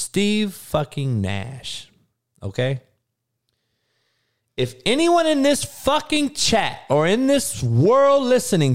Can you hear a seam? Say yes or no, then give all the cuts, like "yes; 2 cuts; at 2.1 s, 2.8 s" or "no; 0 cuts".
no; 0 cuts